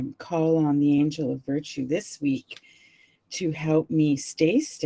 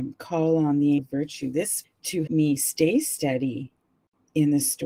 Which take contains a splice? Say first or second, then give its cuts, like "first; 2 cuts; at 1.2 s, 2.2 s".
second; 3 cuts; at 1.0 s, 1.8 s, 2.3 s